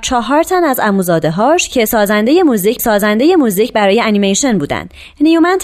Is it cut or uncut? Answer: cut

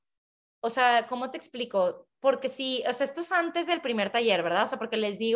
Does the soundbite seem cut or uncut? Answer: uncut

